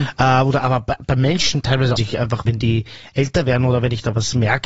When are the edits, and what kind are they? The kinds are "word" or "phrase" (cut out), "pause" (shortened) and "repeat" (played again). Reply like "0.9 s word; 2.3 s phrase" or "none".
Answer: 2.0 s phrase; 2.5 s word